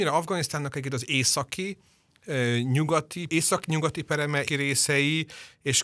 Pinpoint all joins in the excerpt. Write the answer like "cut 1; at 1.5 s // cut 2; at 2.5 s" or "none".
cut 1; at 3.3 s // cut 2; at 4.5 s